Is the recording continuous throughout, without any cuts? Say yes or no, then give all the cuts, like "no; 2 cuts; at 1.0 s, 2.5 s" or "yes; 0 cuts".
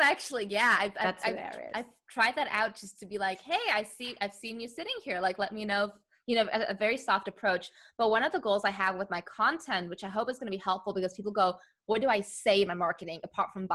yes; 0 cuts